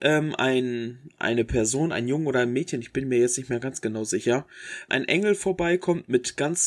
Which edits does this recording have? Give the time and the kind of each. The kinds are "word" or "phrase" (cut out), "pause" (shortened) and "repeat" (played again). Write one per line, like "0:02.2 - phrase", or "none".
0:04.9 - word